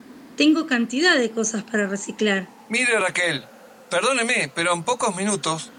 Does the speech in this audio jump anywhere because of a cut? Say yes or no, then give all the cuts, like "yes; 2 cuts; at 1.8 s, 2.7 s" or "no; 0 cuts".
no; 0 cuts